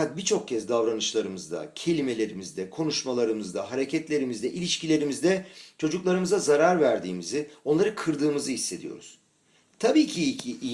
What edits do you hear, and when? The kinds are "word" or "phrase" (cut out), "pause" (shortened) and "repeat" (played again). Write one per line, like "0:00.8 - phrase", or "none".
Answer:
none